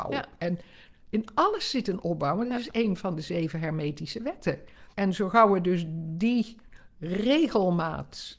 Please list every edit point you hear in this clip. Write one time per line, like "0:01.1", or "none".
0:04.9